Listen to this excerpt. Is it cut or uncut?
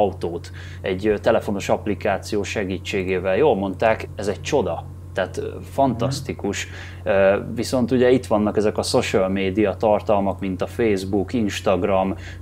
uncut